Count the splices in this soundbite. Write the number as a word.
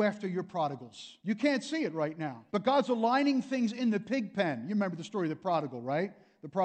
two